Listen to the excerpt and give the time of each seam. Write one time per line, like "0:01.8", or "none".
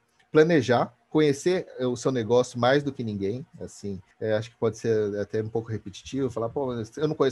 0:04.1